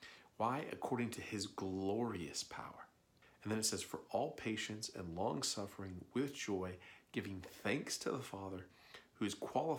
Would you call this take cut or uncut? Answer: cut